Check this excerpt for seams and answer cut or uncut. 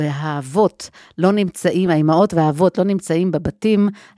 uncut